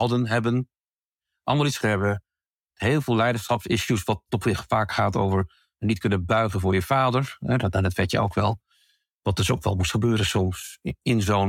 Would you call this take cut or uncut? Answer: cut